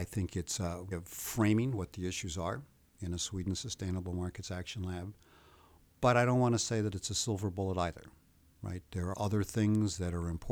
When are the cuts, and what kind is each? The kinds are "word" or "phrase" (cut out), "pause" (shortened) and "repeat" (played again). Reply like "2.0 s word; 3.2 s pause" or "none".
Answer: 0.9 s word; 9.1 s word